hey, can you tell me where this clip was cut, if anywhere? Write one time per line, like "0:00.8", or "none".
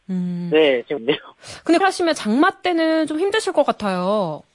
0:01.0
0:01.8